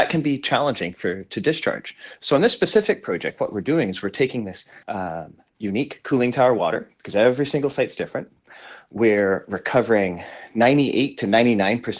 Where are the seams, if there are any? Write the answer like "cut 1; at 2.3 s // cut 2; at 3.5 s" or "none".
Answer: cut 1; at 4.8 s